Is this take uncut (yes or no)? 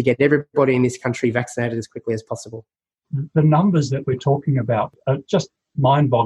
yes